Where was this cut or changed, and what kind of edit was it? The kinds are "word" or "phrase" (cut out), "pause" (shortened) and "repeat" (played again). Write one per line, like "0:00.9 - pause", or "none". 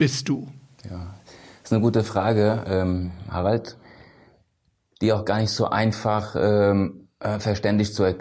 none